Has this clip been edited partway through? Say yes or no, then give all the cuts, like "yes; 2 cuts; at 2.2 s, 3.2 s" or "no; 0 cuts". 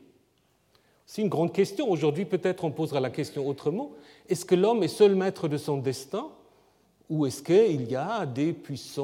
no; 0 cuts